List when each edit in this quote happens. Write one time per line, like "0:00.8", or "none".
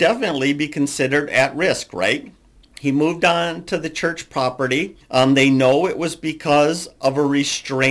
0:02.6
0:05.0